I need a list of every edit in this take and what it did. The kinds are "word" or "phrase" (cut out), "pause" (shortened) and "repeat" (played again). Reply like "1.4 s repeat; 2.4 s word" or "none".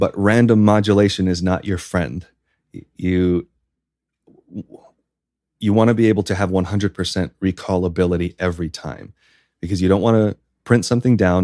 none